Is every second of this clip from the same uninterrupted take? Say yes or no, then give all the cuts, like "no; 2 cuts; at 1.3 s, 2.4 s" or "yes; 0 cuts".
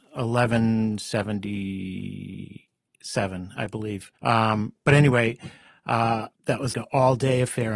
no; 3 cuts; at 4.2 s, 6.4 s, 6.7 s